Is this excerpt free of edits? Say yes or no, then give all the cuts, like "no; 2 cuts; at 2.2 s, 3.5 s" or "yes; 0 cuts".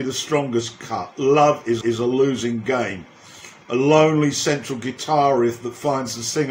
no; 1 cut; at 1.8 s